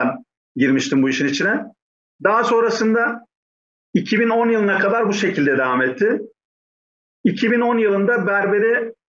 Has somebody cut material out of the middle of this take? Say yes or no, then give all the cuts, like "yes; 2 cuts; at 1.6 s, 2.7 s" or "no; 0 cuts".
no; 0 cuts